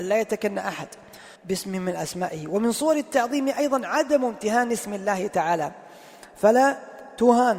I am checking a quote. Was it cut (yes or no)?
yes